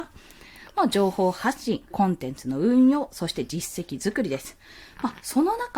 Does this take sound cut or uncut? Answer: cut